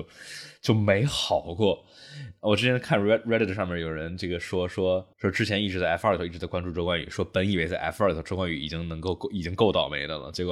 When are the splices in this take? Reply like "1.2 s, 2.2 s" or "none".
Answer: 5.1 s

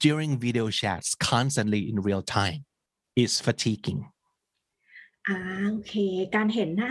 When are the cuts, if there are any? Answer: 3.0 s

